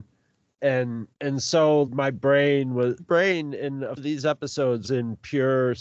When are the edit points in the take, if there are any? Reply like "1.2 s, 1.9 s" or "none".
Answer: 1.1 s, 1.8 s, 3.0 s, 4.0 s, 4.8 s